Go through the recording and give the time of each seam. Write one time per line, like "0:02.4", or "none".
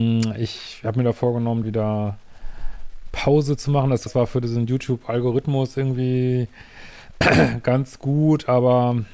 0:01.6
0:04.1